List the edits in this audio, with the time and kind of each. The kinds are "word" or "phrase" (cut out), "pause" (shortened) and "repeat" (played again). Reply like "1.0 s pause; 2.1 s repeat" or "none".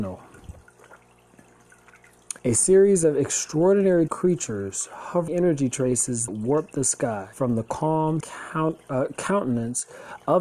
2.4 s pause; 4.1 s word; 5.3 s phrase; 6.3 s word; 7.3 s pause; 8.2 s word